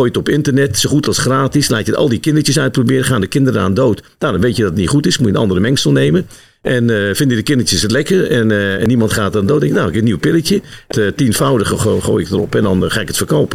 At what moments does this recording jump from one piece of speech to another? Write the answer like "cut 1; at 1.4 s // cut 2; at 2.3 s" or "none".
cut 1; at 10.9 s